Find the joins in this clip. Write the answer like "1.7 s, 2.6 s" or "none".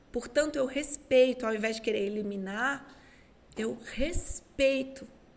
none